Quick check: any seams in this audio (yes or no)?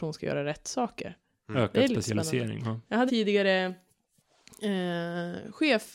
yes